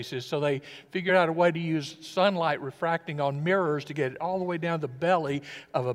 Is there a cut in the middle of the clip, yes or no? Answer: no